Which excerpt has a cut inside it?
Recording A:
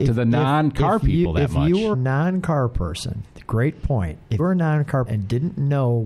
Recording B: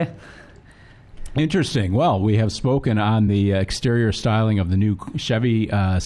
A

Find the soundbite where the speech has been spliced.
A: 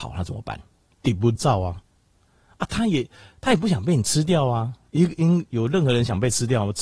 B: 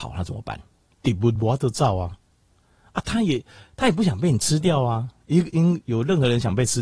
A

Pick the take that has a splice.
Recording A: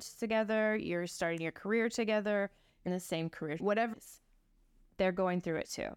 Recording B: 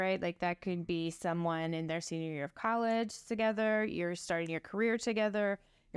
A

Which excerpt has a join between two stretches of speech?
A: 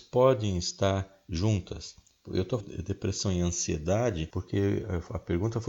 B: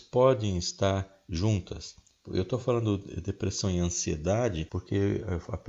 A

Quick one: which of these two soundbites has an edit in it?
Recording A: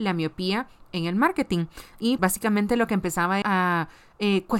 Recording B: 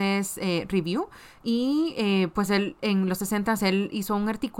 A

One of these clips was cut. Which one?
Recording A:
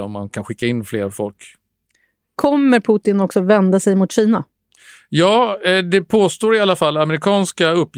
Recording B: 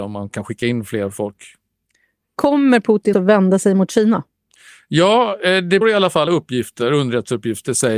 B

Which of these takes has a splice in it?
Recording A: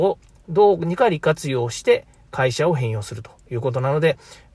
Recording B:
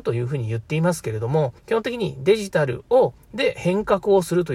B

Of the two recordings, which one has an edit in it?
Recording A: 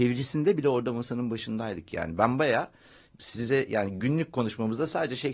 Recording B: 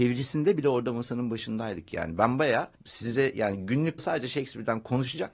B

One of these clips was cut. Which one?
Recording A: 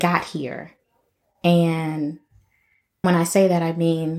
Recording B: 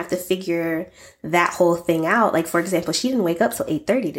A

